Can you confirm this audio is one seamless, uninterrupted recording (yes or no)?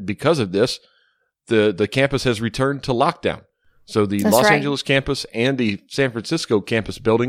yes